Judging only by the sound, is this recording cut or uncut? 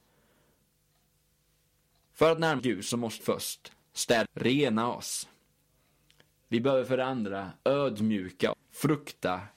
cut